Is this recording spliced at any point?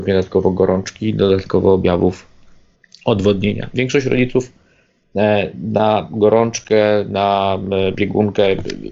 no; 0 cuts

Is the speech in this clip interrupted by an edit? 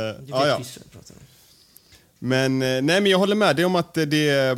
no; 0 cuts

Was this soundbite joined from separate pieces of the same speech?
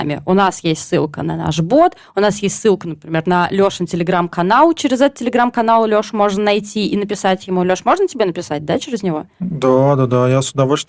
no; 0 cuts

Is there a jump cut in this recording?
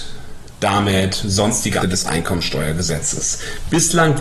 yes; 1 cut; at 1.8 s

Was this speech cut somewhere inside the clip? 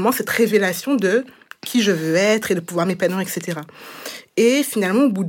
no; 0 cuts

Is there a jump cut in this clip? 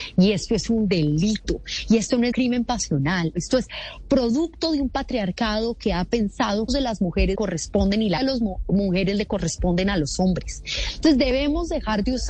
yes; 5 cuts; at 2.3 s, 3.3 s, 6.7 s, 7.4 s, 8.2 s

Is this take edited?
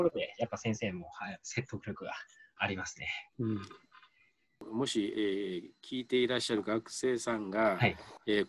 yes; 1 cut; at 3.3 s

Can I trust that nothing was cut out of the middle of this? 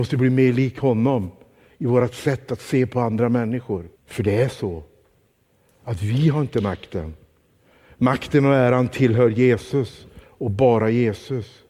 no; 1 cut; at 3.9 s

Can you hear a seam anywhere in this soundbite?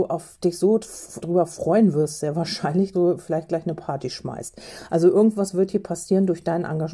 yes; 2 cuts; at 1.2 s, 2.9 s

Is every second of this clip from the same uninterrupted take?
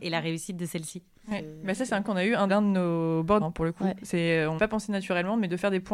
no; 4 cuts; at 2.0 s, 2.5 s, 3.4 s, 4.6 s

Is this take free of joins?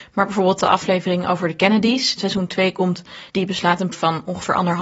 no; 3 cuts; at 2.2 s, 3.3 s, 3.9 s

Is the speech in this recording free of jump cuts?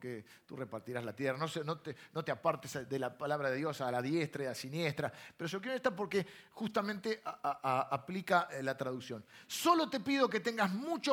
yes; 0 cuts

